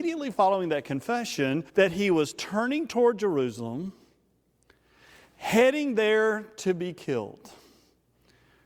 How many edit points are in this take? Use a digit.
1